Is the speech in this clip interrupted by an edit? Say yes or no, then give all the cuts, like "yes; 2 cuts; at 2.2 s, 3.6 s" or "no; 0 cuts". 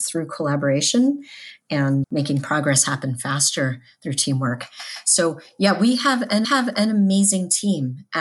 yes; 2 cuts; at 2.0 s, 6.4 s